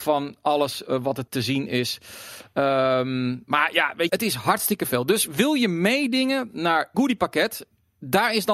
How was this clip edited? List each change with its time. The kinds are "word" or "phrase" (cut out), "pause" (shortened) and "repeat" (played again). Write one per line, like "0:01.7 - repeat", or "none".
0:01.3 - word
0:04.1 - word
0:06.9 - phrase